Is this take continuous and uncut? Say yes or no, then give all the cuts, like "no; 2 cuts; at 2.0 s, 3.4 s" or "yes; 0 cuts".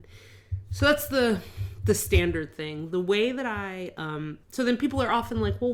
no; 1 cut; at 4.4 s